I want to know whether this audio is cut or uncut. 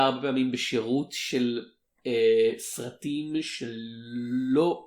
uncut